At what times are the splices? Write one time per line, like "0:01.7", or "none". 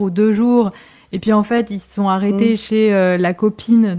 none